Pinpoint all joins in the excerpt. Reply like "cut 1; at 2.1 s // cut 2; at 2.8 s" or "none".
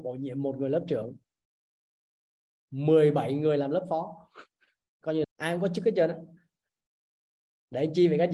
cut 1; at 5.2 s